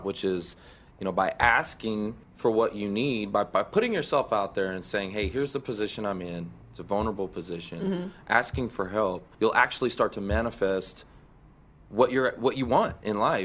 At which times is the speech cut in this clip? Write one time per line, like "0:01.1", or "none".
0:02.2
0:06.6
0:09.3